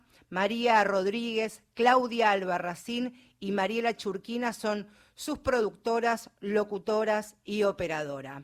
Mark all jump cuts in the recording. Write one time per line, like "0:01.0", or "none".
none